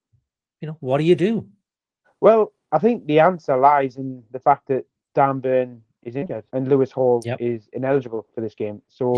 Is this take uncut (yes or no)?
no